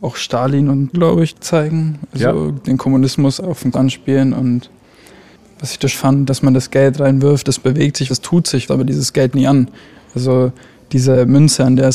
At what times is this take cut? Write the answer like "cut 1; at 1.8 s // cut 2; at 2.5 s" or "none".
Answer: cut 1; at 0.9 s // cut 2; at 1.3 s // cut 3; at 3.4 s // cut 4; at 3.7 s // cut 5; at 5.9 s // cut 6; at 6.3 s // cut 7; at 8.1 s // cut 8; at 8.7 s // cut 9; at 9.3 s